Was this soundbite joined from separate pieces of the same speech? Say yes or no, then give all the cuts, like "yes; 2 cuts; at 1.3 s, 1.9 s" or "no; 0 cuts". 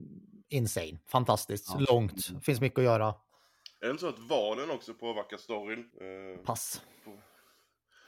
yes; 1 cut; at 5.9 s